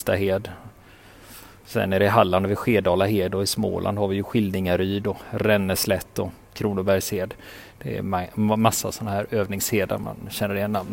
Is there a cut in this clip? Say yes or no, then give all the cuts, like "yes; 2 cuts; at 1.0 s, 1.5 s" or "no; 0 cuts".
no; 0 cuts